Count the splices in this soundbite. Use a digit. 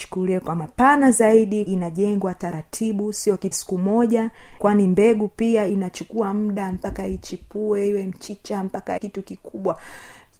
4